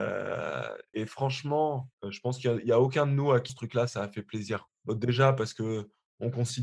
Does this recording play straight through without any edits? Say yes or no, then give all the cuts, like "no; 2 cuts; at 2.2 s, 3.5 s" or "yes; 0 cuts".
no; 4 cuts; at 0.9 s, 1.9 s, 3.5 s, 4.7 s